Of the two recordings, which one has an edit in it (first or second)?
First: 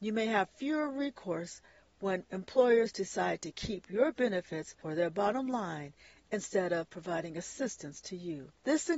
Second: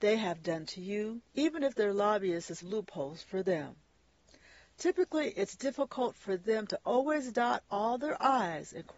second